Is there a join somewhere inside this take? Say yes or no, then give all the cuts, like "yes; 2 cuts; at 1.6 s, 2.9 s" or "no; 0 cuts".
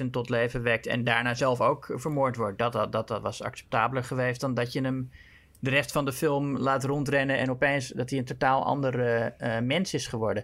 no; 0 cuts